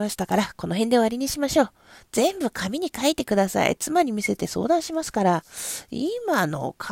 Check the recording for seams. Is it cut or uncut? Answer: uncut